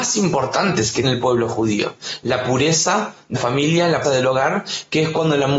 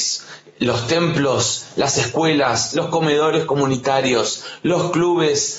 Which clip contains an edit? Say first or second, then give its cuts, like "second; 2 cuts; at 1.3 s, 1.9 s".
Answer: first; 3 cuts; at 1.0 s, 3.3 s, 4.0 s